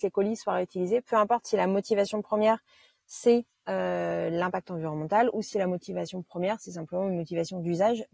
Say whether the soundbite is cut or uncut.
uncut